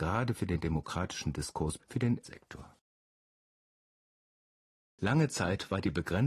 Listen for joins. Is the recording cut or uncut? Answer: cut